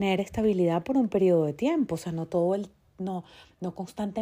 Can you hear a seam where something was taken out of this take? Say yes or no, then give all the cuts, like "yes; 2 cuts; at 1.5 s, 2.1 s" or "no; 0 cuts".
no; 0 cuts